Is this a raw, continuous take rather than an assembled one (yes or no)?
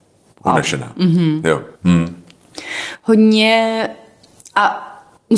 no